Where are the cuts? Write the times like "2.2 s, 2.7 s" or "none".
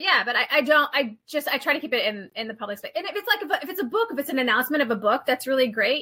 none